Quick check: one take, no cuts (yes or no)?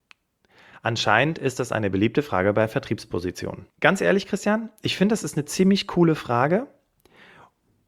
no